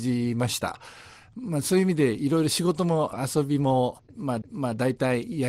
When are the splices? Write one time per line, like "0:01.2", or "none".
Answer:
0:04.4

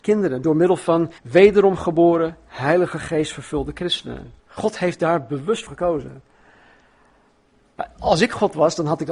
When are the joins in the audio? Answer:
0:01.2
0:04.4
0:05.7

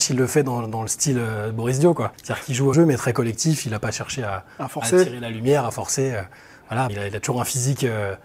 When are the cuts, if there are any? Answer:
0:02.1
0:02.7
0:06.9

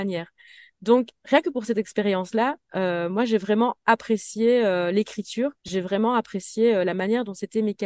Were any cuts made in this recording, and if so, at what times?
0:02.6
0:05.6

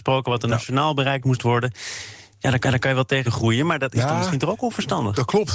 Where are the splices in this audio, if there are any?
0:02.6
0:03.2

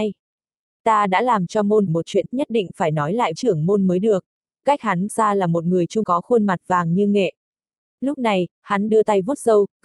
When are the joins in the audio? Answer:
0:01.9
0:02.3
0:03.3
0:04.6
0:05.1
0:06.0
0:08.9

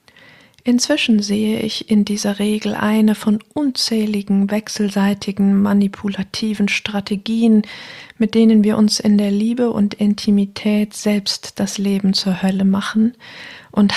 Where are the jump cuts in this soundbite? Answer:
none

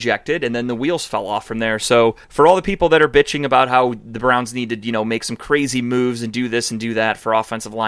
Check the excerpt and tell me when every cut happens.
0:02.2

